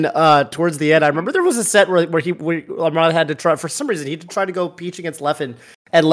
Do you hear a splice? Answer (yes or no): no